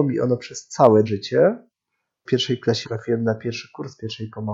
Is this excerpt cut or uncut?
cut